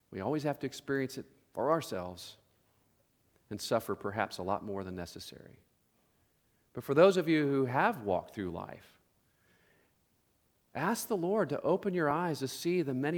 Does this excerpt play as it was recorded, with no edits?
yes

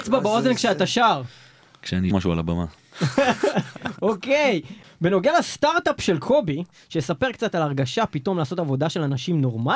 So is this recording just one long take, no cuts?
no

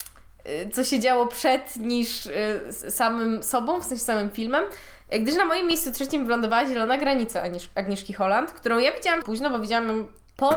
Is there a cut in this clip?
yes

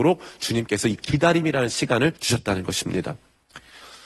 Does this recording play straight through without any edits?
no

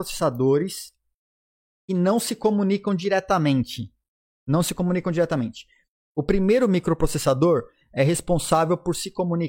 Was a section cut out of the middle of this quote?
no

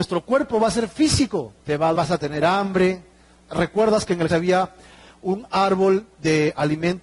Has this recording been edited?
yes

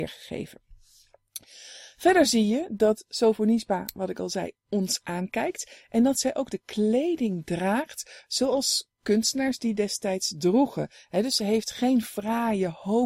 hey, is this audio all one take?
yes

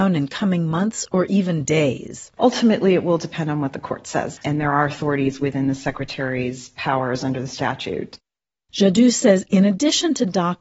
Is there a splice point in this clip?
no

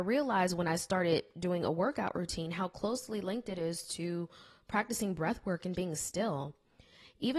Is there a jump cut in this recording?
yes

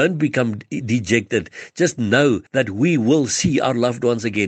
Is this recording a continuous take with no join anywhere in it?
no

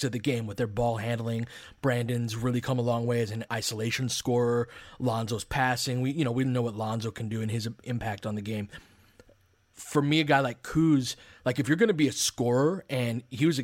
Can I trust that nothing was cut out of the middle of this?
yes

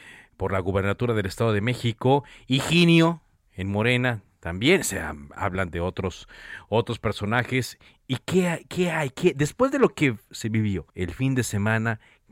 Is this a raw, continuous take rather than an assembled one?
no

